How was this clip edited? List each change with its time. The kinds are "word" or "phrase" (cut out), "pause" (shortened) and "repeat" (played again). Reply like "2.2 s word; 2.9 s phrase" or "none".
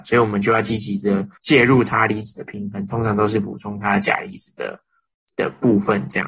1.4 s pause